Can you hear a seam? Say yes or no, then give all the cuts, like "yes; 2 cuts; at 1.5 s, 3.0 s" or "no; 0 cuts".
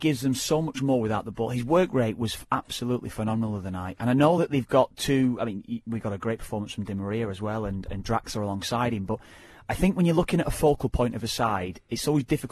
no; 0 cuts